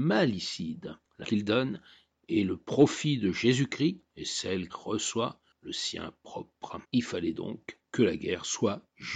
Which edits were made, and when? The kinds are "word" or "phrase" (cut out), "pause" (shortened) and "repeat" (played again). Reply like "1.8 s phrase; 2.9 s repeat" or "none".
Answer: 1.2 s word; 4.7 s word; 6.8 s pause